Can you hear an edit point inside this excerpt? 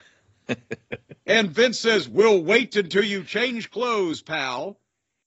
no; 0 cuts

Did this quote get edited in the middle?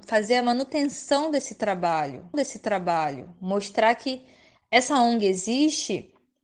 yes; 1 cut; at 2.3 s

